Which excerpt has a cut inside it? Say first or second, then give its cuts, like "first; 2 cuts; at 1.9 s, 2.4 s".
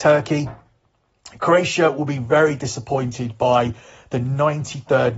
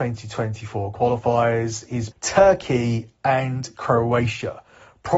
second; 1 cut; at 2.1 s